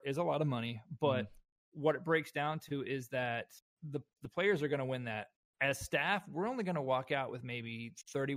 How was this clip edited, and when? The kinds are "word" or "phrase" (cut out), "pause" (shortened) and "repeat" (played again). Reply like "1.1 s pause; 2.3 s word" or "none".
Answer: none